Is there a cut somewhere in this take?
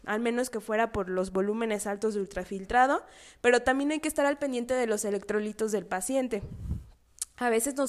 no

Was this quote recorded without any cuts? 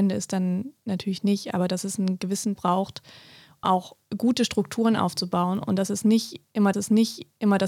no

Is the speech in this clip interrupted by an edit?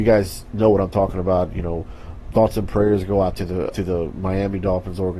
yes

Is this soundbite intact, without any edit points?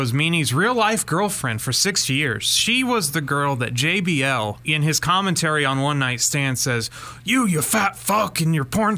yes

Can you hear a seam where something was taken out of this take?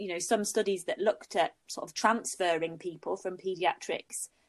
no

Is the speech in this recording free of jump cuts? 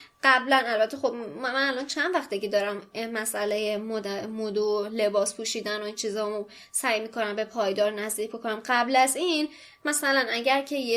yes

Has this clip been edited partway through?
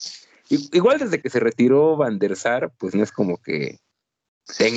yes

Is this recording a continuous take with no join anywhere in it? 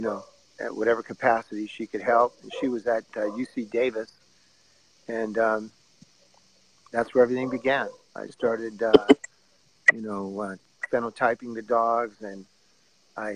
yes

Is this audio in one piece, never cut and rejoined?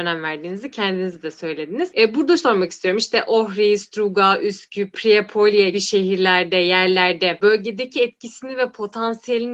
no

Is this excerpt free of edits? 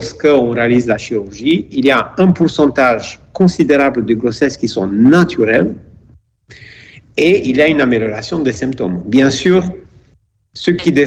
yes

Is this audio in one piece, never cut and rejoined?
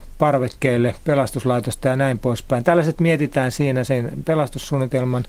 yes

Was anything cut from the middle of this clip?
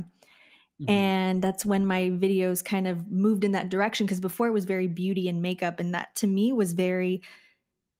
no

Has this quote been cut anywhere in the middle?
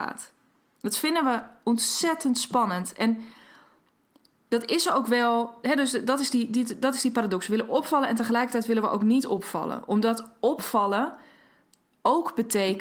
no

